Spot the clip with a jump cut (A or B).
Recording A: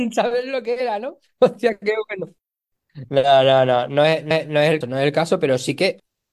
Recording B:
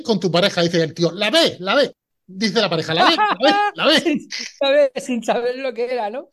A